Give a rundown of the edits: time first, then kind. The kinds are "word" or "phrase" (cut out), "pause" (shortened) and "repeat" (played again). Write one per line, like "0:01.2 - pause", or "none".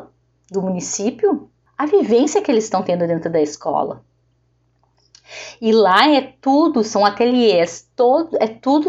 none